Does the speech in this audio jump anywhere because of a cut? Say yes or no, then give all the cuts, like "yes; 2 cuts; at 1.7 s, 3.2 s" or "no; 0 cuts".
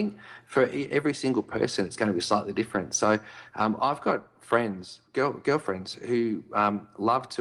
no; 0 cuts